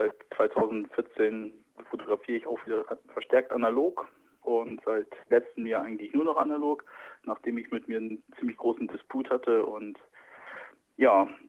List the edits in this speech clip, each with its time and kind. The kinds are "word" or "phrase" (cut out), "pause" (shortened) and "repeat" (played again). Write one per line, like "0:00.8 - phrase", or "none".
none